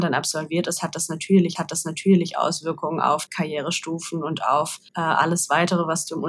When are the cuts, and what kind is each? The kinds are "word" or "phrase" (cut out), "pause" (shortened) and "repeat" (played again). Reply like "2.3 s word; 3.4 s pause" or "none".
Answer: 1.6 s repeat; 3.3 s word; 4.9 s pause